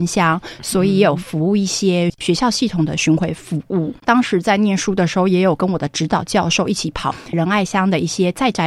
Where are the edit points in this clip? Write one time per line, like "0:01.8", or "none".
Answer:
0:04.0